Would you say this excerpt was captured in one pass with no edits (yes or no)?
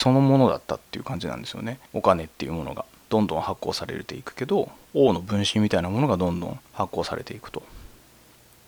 no